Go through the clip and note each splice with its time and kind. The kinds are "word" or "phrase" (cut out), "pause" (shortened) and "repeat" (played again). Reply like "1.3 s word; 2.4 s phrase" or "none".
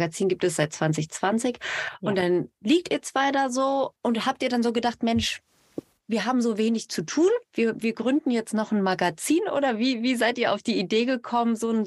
none